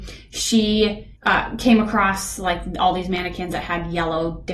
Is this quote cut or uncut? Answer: cut